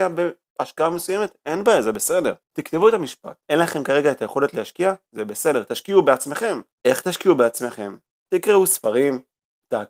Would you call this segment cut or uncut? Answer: cut